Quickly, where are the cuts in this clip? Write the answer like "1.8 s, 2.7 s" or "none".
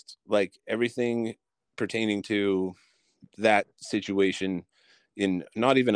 none